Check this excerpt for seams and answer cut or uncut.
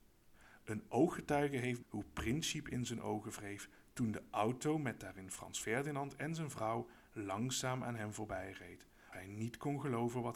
cut